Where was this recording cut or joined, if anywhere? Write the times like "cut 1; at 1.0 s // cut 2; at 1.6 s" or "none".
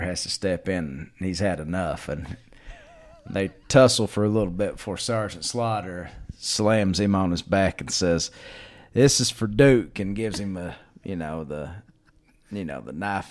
none